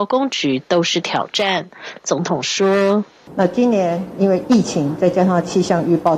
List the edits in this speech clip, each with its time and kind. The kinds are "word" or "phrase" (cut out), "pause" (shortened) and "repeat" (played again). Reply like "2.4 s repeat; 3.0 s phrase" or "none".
3.1 s pause